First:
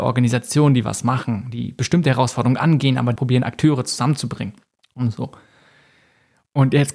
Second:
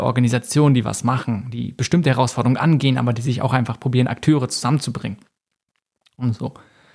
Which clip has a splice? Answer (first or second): first